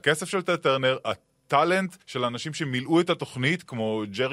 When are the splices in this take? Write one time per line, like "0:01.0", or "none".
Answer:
0:02.0